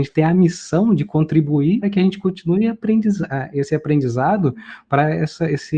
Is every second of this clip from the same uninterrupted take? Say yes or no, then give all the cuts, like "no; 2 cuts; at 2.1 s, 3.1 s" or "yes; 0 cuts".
no; 1 cut; at 1.8 s